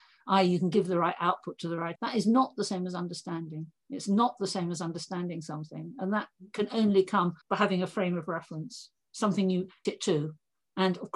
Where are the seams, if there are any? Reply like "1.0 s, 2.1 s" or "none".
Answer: 1.9 s, 7.4 s, 9.8 s